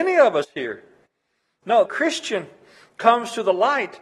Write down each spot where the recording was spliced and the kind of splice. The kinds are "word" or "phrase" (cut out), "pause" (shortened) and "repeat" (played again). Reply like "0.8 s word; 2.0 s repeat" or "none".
1.8 s phrase

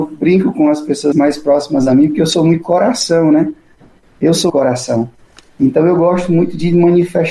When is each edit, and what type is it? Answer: 1.1 s word; 4.5 s word

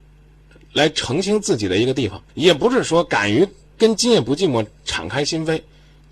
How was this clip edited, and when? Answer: 2.3 s pause

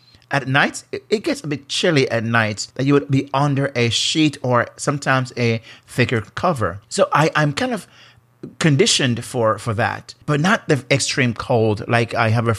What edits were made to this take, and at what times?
2.7 s pause; 6.8 s pause; 10.2 s pause

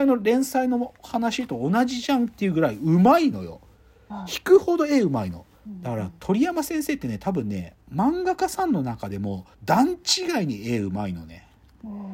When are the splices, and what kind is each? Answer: 5.5 s pause; 9.5 s pause

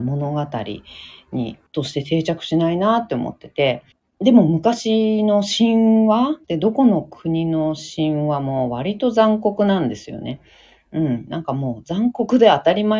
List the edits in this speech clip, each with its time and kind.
1.7 s pause; 3.9 s pause; 6.4 s pause

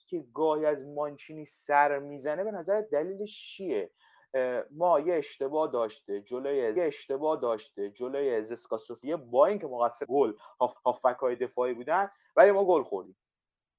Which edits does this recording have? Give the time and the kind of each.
6.8 s repeat; 10.0 s word; 10.8 s repeat

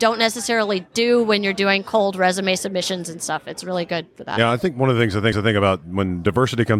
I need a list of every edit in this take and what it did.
5.3 s repeat

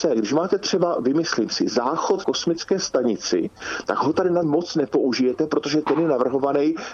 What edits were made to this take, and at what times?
2.2 s word; 4.4 s word

